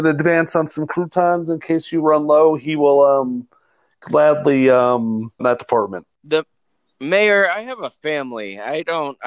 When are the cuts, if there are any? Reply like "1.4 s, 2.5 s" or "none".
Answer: 5.4 s, 6.1 s